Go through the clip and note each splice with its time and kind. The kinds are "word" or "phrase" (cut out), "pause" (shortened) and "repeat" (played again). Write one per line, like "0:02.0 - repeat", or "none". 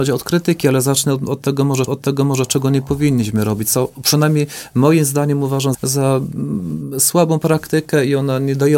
0:01.9 - repeat
0:05.7 - word